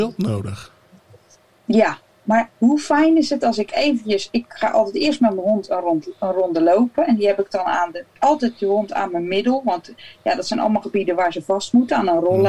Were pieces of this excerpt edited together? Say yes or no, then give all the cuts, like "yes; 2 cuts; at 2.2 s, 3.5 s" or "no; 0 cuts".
yes; 2 cuts; at 2.5 s, 8.1 s